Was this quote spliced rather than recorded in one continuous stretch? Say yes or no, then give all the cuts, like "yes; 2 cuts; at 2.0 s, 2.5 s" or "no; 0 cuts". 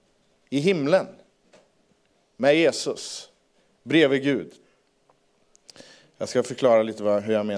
no; 0 cuts